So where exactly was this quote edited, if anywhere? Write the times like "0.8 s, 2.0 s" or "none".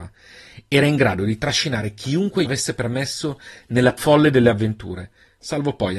2.4 s, 4.0 s